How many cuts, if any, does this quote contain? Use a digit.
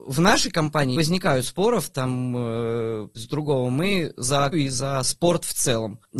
3